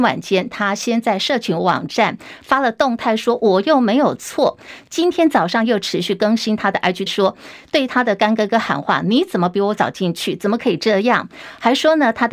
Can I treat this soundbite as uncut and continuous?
no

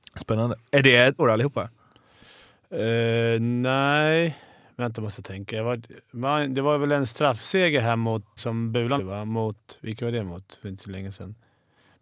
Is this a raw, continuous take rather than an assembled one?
no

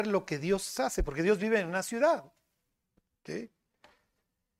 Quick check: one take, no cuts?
yes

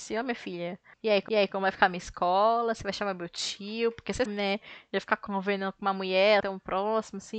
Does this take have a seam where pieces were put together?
yes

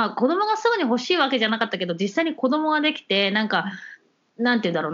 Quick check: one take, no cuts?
yes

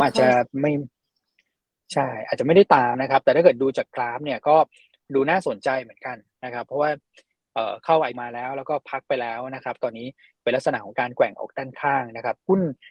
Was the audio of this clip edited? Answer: yes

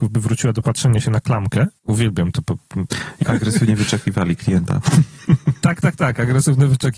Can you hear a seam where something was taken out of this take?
yes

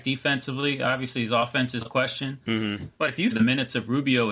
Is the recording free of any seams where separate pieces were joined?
no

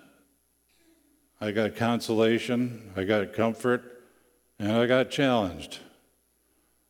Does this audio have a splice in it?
no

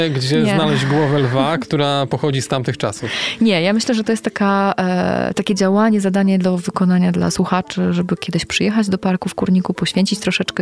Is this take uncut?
yes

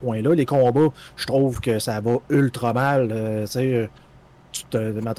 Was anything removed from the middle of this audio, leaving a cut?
no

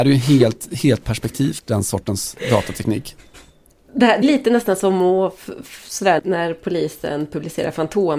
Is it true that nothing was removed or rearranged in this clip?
no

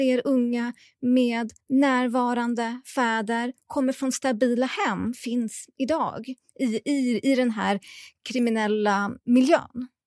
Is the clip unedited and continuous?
no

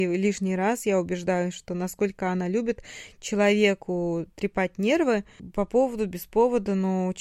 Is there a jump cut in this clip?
no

